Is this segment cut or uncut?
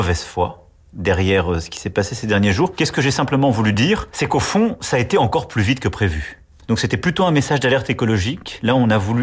uncut